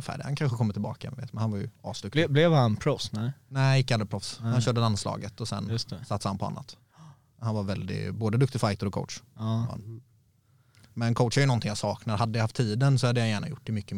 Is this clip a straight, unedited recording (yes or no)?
yes